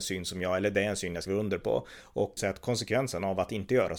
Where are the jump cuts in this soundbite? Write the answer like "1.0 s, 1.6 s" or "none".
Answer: 1.3 s, 2.4 s